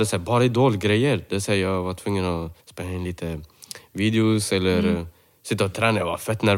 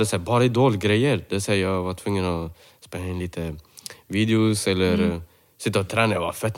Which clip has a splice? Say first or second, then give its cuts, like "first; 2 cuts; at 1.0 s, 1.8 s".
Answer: first; 1 cut; at 2.6 s